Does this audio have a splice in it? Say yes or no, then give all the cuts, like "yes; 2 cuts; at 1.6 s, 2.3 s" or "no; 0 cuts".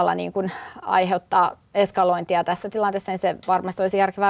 no; 0 cuts